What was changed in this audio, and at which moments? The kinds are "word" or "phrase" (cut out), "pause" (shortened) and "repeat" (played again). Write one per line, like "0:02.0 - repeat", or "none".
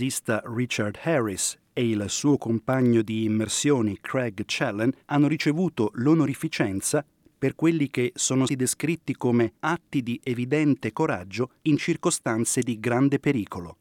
0:05.0 - pause
0:08.5 - word
0:09.6 - pause
0:11.6 - pause